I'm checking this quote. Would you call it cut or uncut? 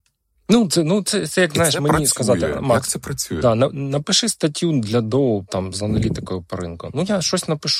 uncut